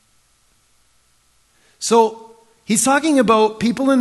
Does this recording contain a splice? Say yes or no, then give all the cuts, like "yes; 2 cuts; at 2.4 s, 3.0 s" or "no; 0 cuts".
no; 0 cuts